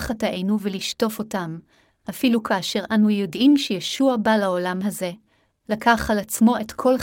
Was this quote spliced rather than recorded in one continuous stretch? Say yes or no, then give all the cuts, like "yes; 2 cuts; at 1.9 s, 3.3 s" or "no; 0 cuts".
no; 0 cuts